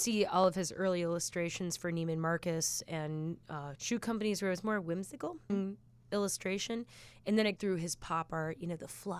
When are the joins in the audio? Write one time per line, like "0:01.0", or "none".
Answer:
0:03.8
0:05.5
0:07.6

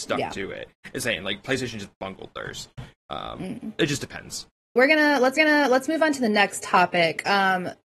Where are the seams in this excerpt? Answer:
0:01.0
0:04.8
0:05.4

